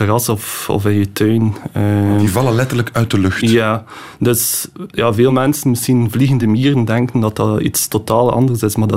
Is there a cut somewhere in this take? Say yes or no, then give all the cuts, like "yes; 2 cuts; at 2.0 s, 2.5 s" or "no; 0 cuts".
no; 0 cuts